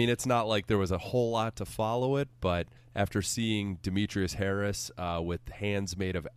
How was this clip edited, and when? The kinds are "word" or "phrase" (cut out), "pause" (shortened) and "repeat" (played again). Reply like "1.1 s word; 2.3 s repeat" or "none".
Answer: 2.8 s pause

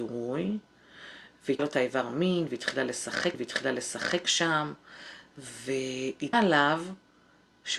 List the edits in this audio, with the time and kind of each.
1.6 s word; 3.3 s repeat; 6.3 s word

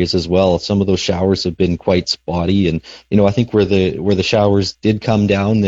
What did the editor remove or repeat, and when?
4.7 s phrase

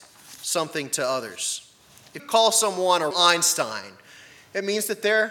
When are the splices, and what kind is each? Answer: 2.2 s word; 3.1 s word

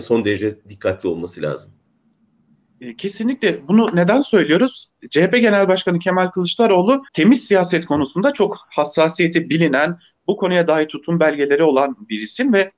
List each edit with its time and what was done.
7.1 s pause

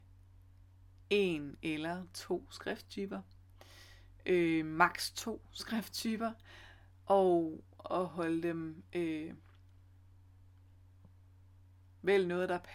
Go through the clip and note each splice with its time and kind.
none

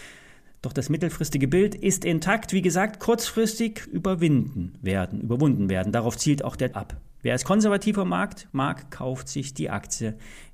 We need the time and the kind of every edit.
3.9 s phrase; 6.7 s word; 8.5 s pause

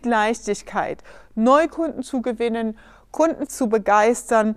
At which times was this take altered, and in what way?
3.5 s phrase

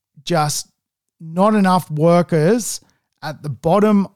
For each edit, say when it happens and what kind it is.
none

